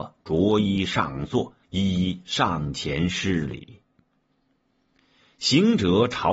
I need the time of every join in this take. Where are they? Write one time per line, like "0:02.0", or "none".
0:01.6